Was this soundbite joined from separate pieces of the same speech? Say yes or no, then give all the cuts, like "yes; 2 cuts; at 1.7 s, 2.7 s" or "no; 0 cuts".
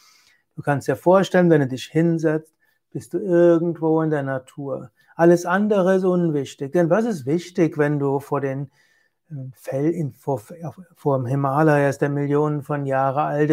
no; 0 cuts